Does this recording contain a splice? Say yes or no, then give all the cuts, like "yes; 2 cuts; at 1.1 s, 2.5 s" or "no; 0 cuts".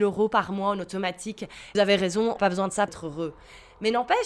yes; 3 cuts; at 1.7 s, 2.4 s, 2.9 s